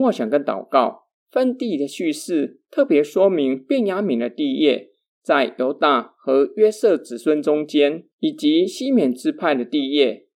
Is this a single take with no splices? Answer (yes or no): no